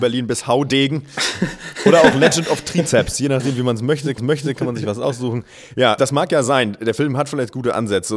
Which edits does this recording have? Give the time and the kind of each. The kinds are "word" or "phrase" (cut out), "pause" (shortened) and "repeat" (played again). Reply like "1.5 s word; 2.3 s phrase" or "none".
4.2 s repeat; 6.0 s word